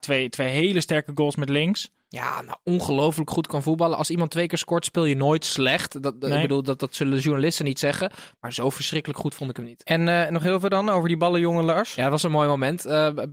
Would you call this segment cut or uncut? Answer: uncut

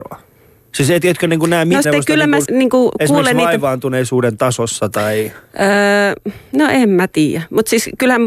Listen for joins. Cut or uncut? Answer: cut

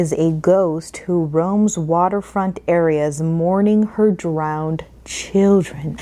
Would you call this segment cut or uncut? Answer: uncut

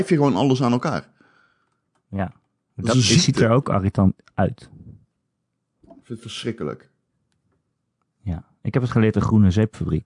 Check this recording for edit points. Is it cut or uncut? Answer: cut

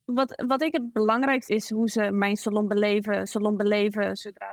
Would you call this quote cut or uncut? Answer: cut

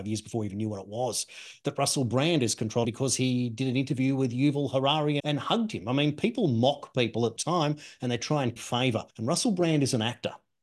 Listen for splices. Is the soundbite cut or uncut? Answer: cut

